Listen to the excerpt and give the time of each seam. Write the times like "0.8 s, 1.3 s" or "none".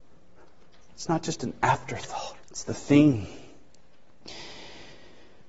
2.4 s

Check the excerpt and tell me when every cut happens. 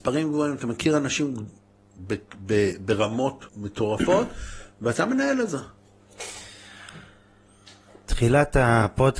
3.5 s

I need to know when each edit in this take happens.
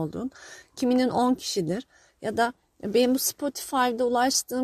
none

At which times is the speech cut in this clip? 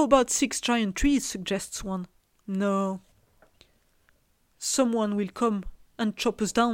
2.2 s

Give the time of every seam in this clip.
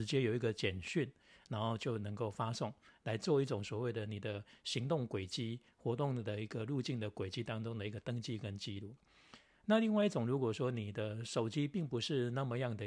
none

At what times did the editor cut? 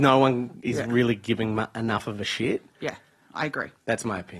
none

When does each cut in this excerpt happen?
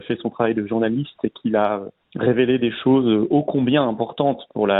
none

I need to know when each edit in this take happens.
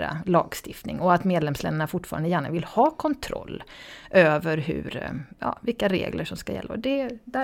none

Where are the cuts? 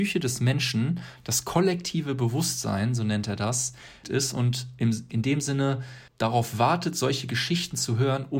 4.0 s, 5.1 s, 6.1 s

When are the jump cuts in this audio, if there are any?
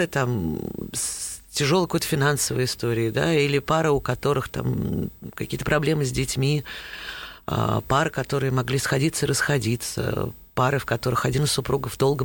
none

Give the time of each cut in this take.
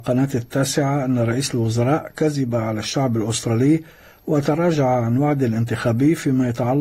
none

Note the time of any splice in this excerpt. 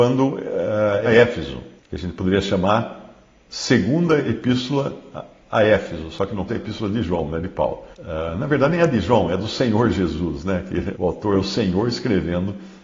1.0 s, 1.8 s, 6.5 s, 7.9 s, 10.9 s

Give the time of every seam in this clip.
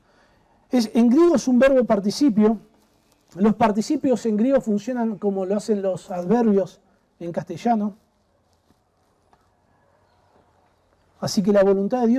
none

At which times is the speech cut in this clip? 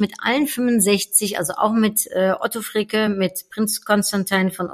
none

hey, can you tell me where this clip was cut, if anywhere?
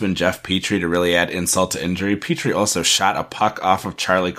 none

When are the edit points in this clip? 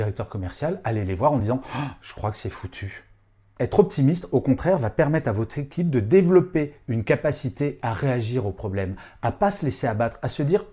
none

